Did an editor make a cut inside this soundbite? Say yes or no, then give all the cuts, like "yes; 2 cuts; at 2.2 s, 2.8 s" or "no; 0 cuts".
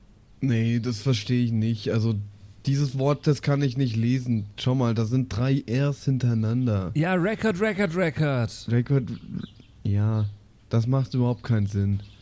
no; 0 cuts